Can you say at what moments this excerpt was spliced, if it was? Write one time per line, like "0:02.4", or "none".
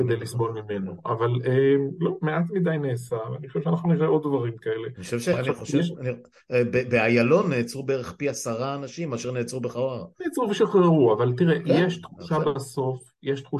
none